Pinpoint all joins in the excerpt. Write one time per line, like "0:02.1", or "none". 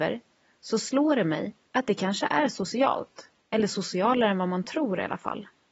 0:01.6
0:03.4